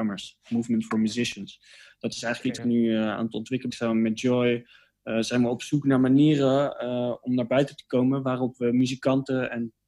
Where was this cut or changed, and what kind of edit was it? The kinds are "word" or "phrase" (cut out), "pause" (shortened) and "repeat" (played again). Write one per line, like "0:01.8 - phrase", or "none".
0:02.6 - word
0:03.7 - phrase